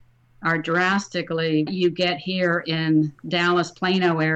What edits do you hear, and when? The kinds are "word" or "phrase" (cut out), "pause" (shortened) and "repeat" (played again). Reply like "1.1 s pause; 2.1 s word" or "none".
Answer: 1.7 s word; 3.2 s pause